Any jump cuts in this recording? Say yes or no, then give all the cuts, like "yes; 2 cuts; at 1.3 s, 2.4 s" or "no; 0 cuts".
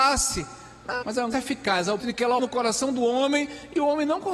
yes; 4 cuts; at 1.0 s, 1.3 s, 2.0 s, 2.4 s